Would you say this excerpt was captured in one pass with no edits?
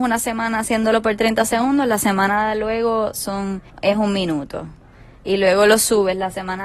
no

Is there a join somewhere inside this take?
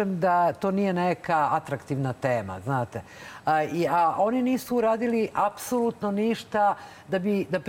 no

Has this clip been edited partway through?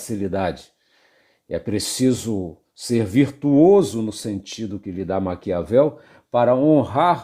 no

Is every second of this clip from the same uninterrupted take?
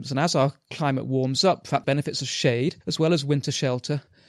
no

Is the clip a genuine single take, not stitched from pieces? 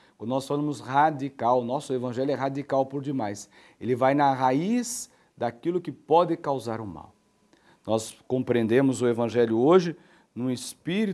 yes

